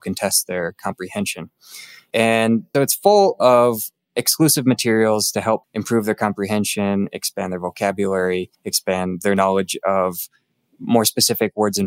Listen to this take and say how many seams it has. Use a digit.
3